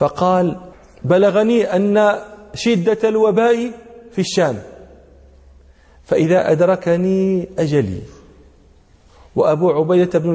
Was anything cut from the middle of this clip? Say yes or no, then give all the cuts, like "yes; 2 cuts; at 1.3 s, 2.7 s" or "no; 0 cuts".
no; 0 cuts